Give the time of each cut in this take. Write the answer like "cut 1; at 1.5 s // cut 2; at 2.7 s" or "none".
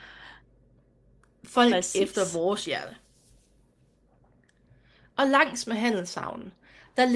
none